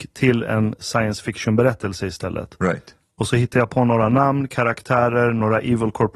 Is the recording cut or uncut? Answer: uncut